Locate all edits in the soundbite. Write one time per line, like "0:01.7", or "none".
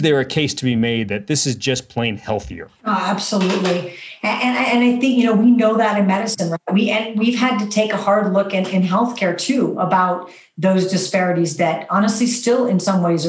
0:02.7